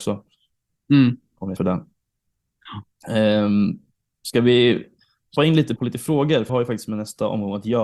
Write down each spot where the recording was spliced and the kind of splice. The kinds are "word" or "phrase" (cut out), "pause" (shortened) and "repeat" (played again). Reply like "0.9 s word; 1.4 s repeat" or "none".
1.6 s word; 5.4 s word; 5.8 s word; 6.5 s word